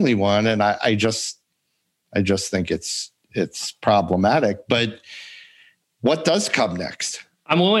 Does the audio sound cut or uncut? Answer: uncut